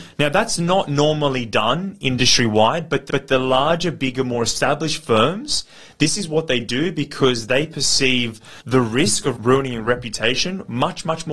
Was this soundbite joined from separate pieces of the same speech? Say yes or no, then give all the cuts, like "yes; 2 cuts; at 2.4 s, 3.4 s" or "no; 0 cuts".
yes; 3 cuts; at 3.1 s, 8.6 s, 9.4 s